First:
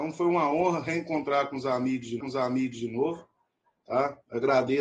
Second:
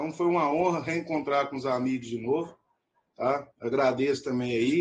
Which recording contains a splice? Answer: first; 1 cut; at 2.2 s

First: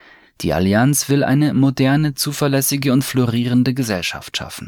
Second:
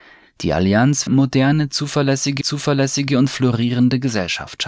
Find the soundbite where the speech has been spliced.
second; 2 cuts; at 1.1 s, 2.4 s

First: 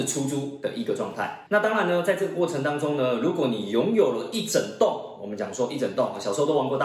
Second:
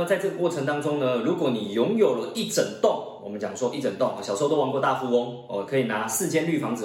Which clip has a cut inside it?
first; 1 cut; at 1.5 s

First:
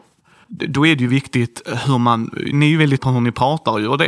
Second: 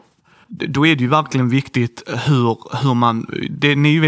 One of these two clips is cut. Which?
first; 4 cuts; at 1.1 s, 1.8 s, 2.5 s, 3.0 s

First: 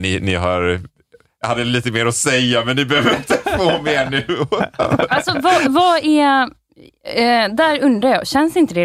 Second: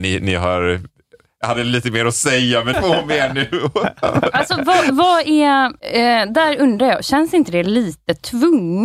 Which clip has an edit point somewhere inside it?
second; 2 cuts; at 2.7 s, 5.8 s

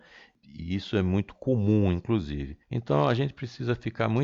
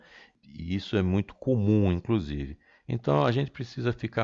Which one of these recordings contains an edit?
first; 1 cut; at 2.6 s

